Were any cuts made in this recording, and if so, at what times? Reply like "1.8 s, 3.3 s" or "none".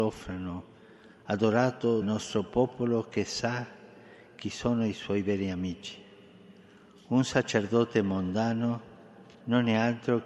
2.0 s

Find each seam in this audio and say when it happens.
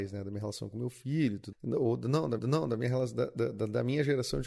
1.5 s, 2.4 s

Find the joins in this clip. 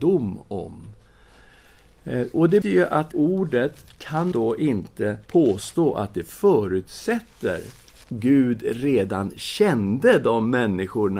2.6 s, 3.1 s, 4.3 s, 5.3 s, 8.0 s

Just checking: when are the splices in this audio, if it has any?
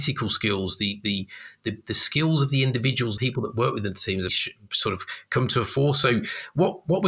3.2 s, 4.3 s

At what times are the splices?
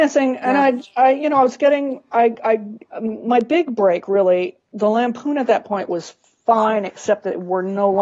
none

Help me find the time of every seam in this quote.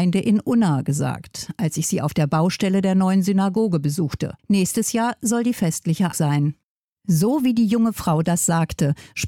4.4 s, 6.1 s

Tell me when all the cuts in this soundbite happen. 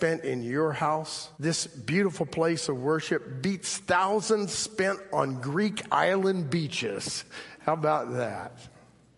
1.3 s

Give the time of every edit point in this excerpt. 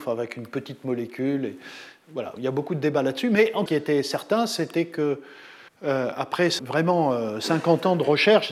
2.4 s, 3.7 s, 5.7 s, 6.6 s

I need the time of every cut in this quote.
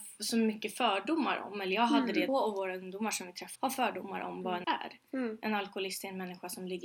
2.3 s, 3.6 s, 4.6 s

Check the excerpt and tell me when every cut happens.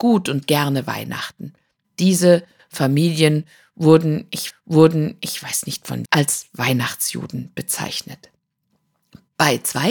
4.5 s, 6.1 s

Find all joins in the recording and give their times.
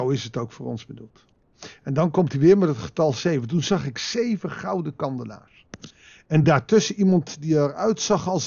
none

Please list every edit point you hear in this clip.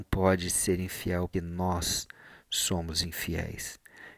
1.3 s

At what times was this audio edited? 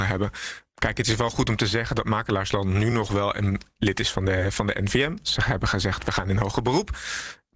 none

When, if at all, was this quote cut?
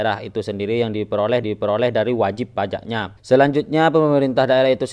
1.4 s, 3.2 s

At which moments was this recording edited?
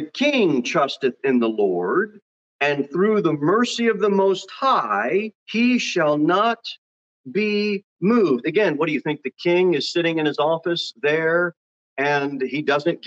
2.4 s, 5.4 s, 7.9 s

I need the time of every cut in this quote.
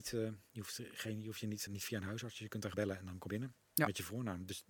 1.7 s, 2.7 s, 3.3 s

